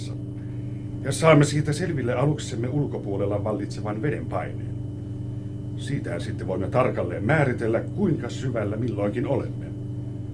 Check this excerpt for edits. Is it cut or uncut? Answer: uncut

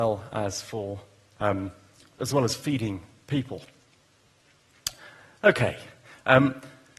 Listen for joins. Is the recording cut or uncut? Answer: uncut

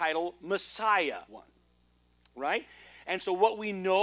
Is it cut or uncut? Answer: cut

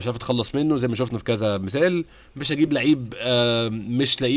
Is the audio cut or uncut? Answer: uncut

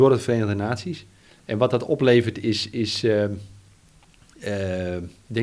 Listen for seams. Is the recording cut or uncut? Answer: cut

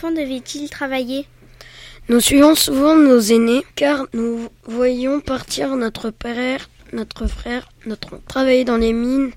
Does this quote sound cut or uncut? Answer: uncut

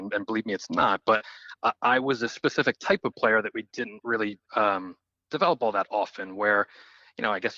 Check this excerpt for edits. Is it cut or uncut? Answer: cut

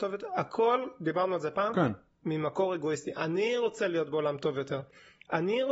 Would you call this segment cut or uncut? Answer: uncut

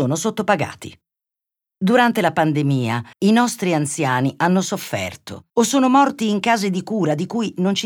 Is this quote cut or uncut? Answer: cut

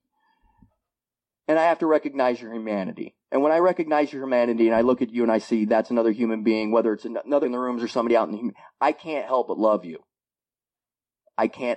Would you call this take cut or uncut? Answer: cut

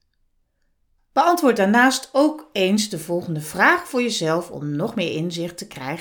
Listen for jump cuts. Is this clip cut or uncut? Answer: uncut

